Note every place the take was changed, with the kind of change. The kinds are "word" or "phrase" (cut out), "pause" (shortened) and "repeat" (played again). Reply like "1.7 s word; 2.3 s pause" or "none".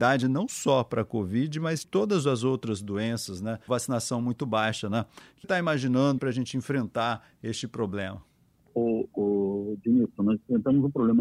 1.8 s word; 3.7 s word; 5.4 s word; 6.2 s word